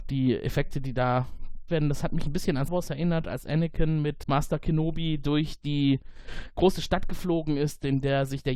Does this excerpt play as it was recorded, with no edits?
no; 3 cuts; at 1.7 s, 2.7 s, 4.2 s

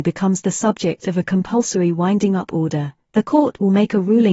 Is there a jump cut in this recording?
no; 0 cuts

